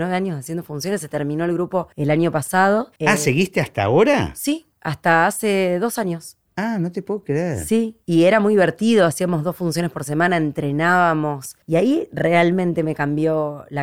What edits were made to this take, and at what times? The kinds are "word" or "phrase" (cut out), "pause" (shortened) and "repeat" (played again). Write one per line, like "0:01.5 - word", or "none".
0:01.9 - pause
0:03.0 - pause
0:04.7 - pause
0:08.0 - pause
0:11.6 - pause